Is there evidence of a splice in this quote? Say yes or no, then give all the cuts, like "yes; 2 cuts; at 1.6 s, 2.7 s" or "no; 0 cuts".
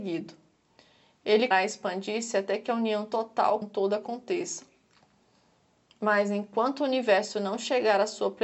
yes; 2 cuts; at 1.5 s, 3.6 s